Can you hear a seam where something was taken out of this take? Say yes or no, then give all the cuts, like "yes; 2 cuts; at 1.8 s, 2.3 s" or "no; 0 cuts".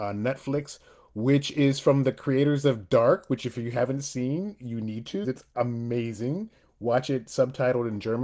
yes; 1 cut; at 5.2 s